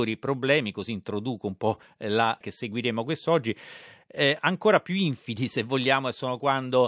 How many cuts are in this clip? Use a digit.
1